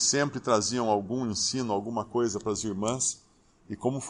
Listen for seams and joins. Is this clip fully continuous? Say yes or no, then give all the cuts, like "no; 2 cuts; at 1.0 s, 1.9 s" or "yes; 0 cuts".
yes; 0 cuts